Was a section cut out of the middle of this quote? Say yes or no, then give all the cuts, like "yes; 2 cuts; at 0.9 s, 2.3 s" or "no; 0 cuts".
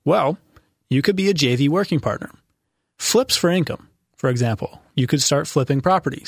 no; 0 cuts